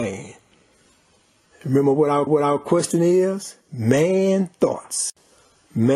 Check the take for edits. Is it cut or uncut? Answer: cut